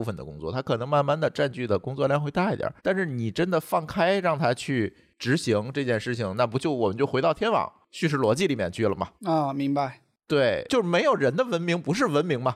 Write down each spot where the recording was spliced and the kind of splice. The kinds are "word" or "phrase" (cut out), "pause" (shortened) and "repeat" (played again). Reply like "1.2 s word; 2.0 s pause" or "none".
2.8 s pause; 9.2 s pause